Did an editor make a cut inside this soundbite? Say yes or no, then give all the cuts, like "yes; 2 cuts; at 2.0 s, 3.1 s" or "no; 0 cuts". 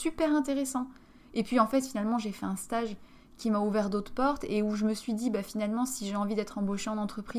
no; 0 cuts